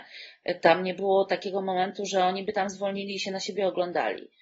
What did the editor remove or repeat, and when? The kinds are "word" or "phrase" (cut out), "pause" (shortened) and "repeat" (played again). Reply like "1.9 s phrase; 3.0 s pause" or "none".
none